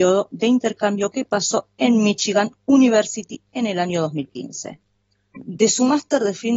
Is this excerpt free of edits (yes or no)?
yes